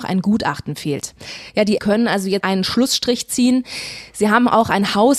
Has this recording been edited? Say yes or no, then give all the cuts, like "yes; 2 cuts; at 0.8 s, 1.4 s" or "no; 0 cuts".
yes; 2 cuts; at 1.8 s, 2.4 s